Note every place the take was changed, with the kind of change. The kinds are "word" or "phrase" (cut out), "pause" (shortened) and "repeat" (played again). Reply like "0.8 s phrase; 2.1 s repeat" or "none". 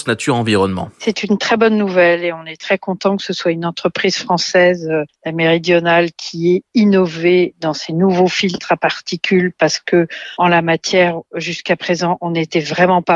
0.9 s pause

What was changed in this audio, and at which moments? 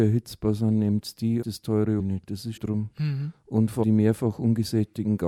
1.4 s phrase; 2.0 s word; 2.6 s word; 3.8 s word

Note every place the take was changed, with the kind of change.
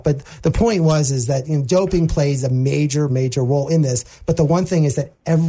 3.1 s word

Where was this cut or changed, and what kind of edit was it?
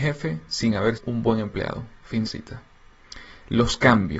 1.0 s word; 2.2 s phrase

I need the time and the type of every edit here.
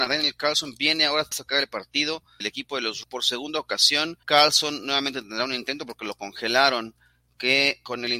1.3 s word; 2.4 s word; 3.0 s word; 4.2 s pause

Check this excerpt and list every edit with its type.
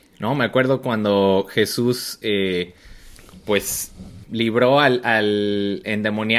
4.2 s word

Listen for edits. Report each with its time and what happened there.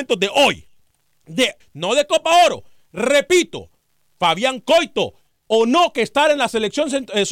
1.6 s word; 5.5 s word

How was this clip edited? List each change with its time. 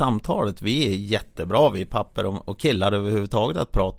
none

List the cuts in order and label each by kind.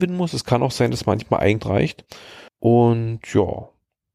1.6 s phrase; 2.5 s pause

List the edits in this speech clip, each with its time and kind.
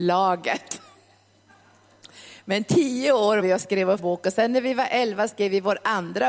3.4 s word; 4.0 s word

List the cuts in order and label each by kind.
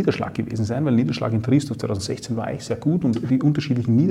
none

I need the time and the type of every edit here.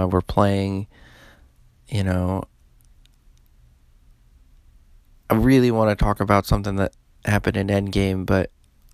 none

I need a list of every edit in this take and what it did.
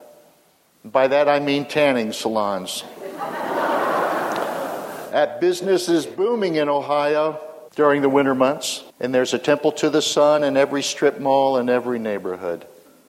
7.7 s pause; 8.9 s pause

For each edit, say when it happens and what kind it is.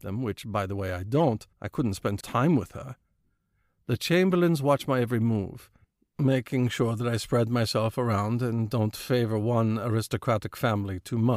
1.5 s pause; 2.2 s phrase

